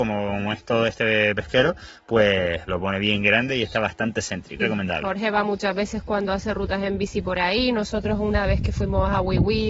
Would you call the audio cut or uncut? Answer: cut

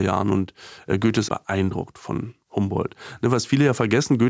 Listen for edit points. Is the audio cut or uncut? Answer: cut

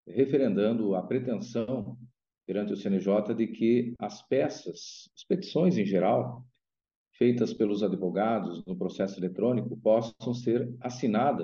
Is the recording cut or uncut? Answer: uncut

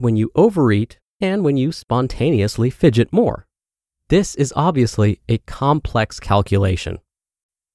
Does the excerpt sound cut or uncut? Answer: uncut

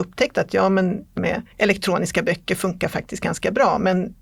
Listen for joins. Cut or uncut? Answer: cut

